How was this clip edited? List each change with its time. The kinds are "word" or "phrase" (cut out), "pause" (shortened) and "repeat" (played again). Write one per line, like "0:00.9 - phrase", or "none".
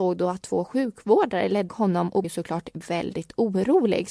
0:01.7 - word
0:02.2 - word